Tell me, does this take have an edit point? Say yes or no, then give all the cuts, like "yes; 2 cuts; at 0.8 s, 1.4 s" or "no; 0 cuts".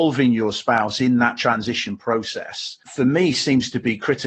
yes; 1 cut; at 2.8 s